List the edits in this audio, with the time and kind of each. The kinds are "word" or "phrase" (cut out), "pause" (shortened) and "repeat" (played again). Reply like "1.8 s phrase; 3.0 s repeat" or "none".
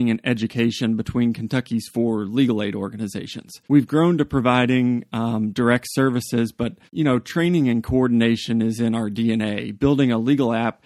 3.6 s pause; 6.9 s pause